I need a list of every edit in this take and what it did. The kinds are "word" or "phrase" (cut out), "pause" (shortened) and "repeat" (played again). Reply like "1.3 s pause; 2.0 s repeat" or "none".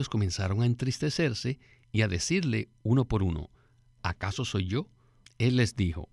none